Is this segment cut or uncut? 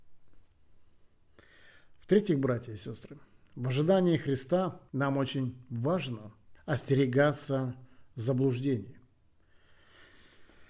cut